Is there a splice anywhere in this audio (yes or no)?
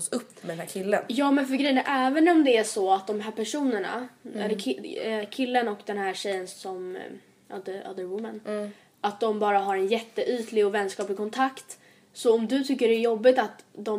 no